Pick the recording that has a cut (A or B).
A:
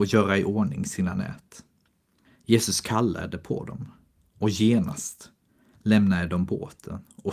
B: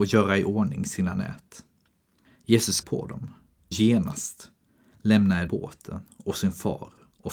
B